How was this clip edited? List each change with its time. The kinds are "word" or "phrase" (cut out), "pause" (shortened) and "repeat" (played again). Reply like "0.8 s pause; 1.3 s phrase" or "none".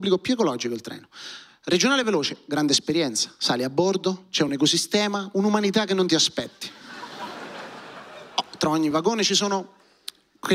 none